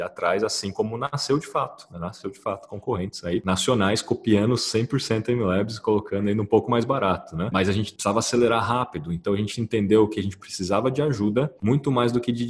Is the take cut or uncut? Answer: uncut